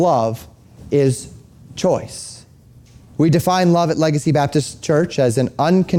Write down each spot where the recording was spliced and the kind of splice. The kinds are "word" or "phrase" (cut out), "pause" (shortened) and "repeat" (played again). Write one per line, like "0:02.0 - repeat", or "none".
none